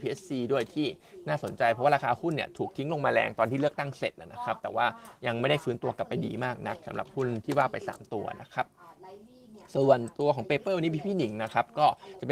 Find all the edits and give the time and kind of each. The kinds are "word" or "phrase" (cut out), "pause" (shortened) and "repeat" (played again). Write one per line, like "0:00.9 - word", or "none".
none